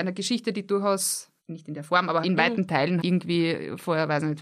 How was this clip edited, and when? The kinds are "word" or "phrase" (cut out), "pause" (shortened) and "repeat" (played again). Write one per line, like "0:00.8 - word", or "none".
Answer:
0:01.4 - pause
0:02.2 - word
0:03.0 - word